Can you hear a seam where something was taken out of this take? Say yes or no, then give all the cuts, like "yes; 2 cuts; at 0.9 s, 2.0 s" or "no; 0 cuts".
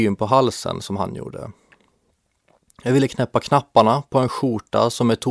no; 0 cuts